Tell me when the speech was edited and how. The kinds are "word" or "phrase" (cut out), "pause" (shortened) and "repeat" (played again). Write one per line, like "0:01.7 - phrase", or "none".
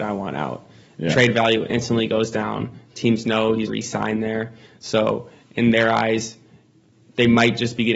0:03.7 - phrase